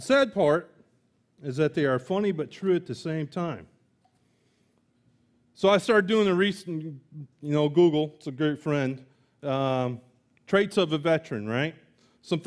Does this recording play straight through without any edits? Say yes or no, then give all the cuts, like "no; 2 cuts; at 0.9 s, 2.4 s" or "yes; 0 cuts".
yes; 0 cuts